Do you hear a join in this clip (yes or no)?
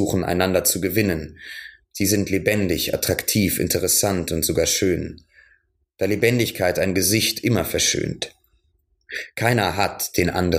no